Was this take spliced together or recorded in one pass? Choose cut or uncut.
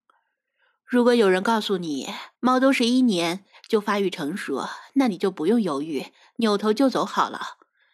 cut